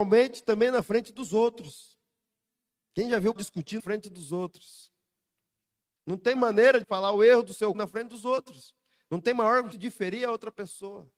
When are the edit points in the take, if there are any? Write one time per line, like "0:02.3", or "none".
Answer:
0:03.4
0:03.8
0:06.4
0:06.8
0:07.7
0:09.7